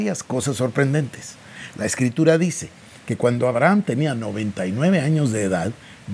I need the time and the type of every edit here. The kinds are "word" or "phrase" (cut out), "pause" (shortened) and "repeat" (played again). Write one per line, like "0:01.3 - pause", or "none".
none